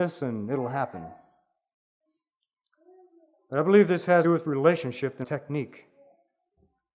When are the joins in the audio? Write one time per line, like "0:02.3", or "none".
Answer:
0:04.2
0:05.2